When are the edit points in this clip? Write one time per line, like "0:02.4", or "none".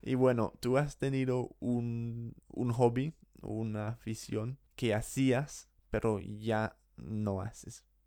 0:02.4
0:04.7
0:05.8